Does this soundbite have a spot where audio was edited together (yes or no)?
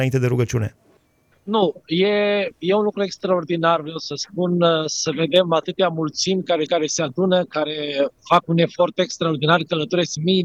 yes